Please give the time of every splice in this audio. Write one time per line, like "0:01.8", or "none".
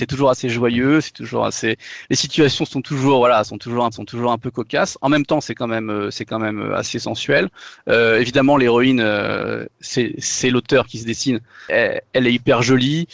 0:03.9